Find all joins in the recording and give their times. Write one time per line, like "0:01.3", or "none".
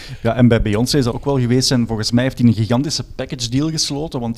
0:01.1